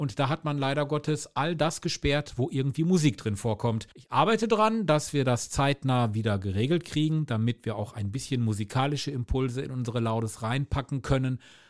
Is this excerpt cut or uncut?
cut